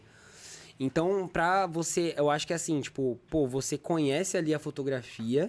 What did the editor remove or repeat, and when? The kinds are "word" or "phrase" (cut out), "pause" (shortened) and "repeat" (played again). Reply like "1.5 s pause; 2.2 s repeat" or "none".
none